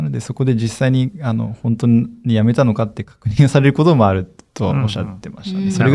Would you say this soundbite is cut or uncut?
uncut